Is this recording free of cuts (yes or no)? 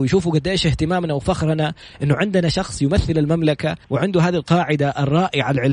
no